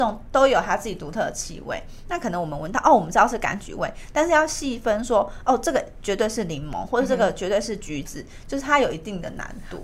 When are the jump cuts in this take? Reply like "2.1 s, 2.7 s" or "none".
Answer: none